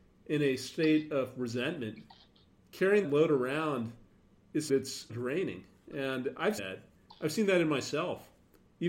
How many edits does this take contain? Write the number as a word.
four